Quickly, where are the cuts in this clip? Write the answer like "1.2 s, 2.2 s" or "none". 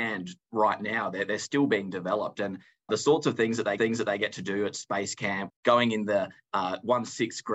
2.9 s, 3.8 s, 5.5 s